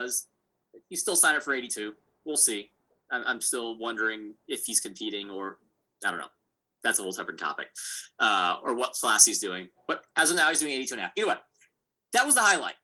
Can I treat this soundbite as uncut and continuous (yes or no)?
yes